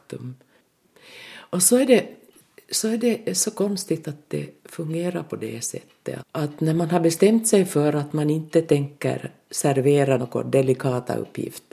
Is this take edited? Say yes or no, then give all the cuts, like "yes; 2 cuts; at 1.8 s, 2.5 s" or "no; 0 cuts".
yes; 2 cuts; at 6.2 s, 10.2 s